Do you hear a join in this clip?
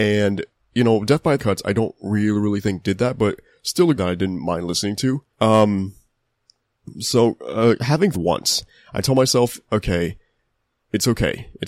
yes; 4 cuts; at 1.4 s, 4.0 s, 5.3 s, 8.1 s

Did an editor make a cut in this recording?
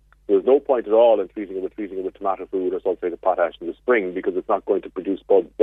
yes; 1 cut; at 1.7 s

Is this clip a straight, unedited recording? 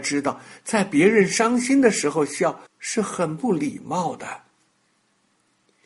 no; 1 cut; at 2.7 s

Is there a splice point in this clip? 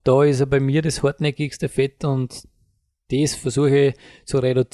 no; 0 cuts

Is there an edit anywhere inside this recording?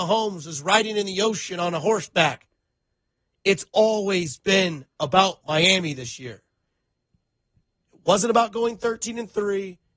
no; 0 cuts

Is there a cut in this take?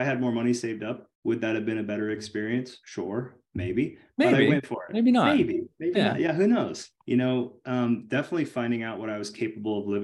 yes; 3 cuts; at 1.1 s, 2.8 s, 6.9 s

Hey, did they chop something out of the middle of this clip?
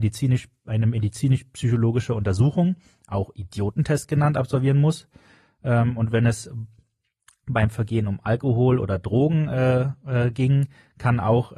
no; 0 cuts

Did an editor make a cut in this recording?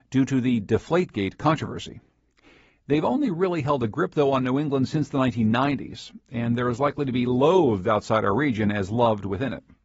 no; 0 cuts

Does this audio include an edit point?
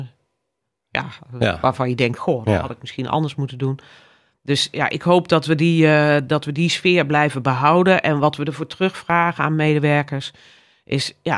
no; 0 cuts

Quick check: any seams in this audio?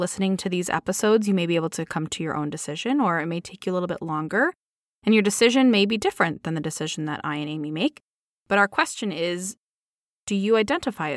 no; 0 cuts

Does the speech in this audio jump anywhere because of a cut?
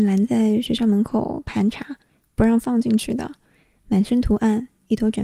no; 0 cuts

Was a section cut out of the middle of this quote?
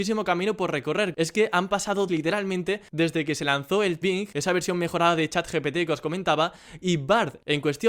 yes; 2 cuts; at 2.1 s, 4.0 s

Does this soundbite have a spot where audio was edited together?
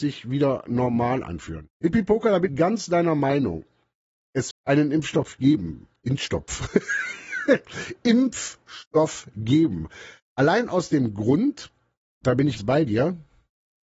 yes; 5 cuts; at 1.7 s, 2.5 s, 4.5 s, 12.2 s, 12.6 s

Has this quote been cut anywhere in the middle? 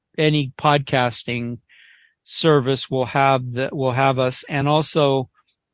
no; 0 cuts

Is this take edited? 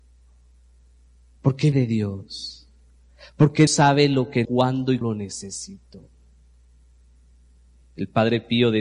yes; 4 cuts; at 1.7 s, 3.7 s, 4.4 s, 5.0 s

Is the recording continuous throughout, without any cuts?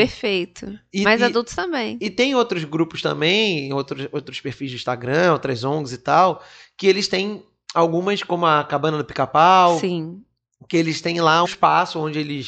no; 1 cut; at 11.4 s

